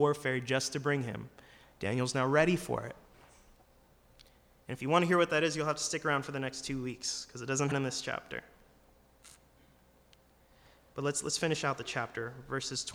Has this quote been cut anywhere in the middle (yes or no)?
yes